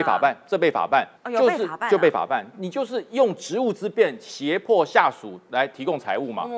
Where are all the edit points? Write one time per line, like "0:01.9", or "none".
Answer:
0:01.2

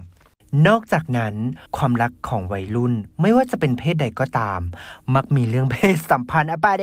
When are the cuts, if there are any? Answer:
0:01.7

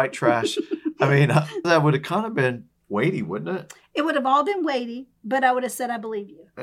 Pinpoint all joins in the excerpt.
0:01.6
0:02.8

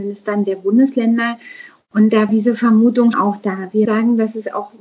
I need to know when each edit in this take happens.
0:02.3
0:03.1
0:03.8

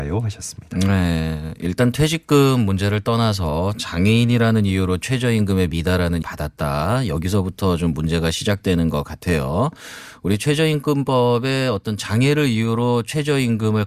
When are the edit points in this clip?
0:06.2

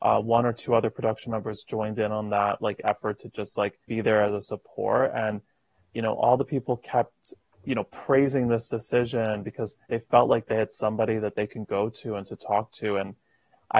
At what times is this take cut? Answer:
0:03.8
0:09.8

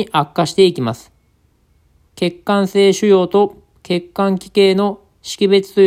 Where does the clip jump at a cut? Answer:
none

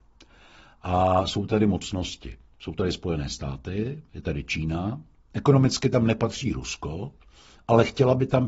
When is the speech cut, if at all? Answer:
none

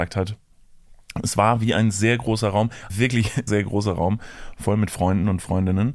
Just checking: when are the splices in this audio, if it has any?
0:02.9
0:03.5

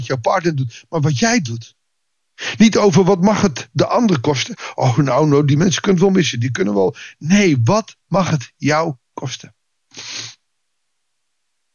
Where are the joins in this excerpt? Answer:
0:08.0

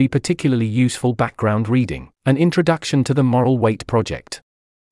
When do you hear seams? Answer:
0:02.1

